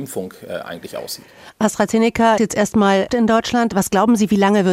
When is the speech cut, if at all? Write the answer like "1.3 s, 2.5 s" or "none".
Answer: 2.4 s, 3.1 s